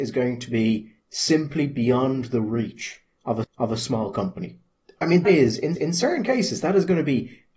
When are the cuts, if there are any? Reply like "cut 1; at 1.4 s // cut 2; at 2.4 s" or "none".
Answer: cut 1; at 3.4 s // cut 2; at 4.8 s // cut 3; at 5.2 s // cut 4; at 5.7 s